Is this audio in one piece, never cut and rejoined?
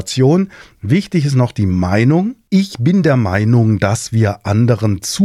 yes; 0 cuts

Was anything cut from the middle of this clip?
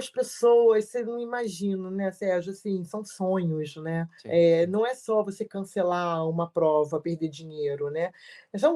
yes; 1 cut; at 4.2 s

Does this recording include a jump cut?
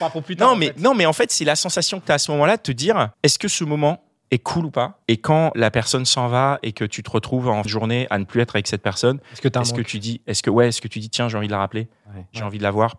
yes; 4 cuts; at 3.1 s, 5.0 s, 5.5 s, 7.6 s

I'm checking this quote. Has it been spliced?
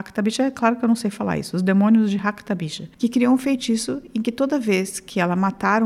no; 0 cuts

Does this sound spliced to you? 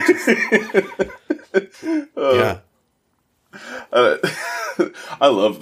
yes; 1 cut; at 1.7 s

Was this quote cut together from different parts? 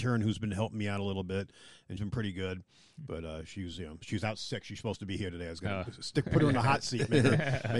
yes; 1 cut; at 2.0 s

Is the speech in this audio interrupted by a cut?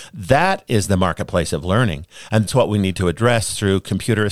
yes; 1 cut; at 2.5 s

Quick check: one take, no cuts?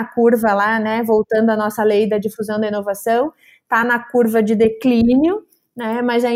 yes; 0 cuts

